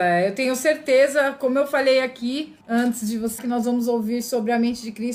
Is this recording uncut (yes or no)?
no